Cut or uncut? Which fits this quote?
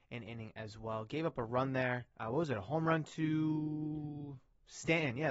cut